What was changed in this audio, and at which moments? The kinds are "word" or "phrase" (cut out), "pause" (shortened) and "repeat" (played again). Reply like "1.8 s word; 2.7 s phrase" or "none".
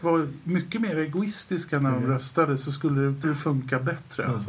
3.2 s word